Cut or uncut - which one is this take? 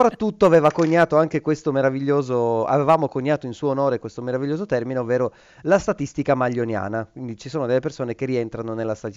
uncut